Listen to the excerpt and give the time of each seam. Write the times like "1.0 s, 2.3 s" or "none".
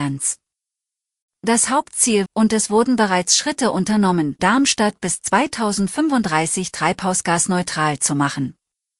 2.3 s, 4.4 s